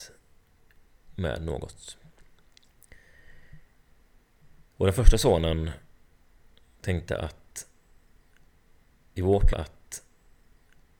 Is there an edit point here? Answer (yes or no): yes